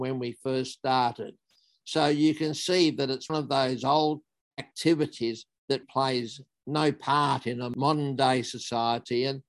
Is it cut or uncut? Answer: cut